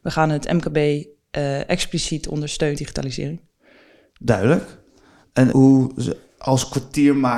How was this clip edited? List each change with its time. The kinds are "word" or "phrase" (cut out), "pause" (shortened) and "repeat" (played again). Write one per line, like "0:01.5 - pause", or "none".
0:02.8 - phrase
0:05.5 - word